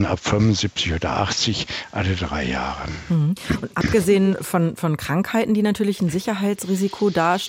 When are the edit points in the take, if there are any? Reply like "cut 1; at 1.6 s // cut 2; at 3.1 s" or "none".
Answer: none